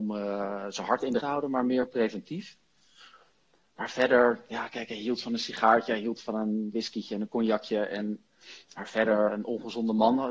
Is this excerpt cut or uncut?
cut